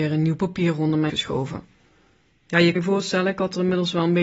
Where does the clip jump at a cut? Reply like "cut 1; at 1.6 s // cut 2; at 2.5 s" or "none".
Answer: cut 1; at 1.1 s // cut 2; at 2.8 s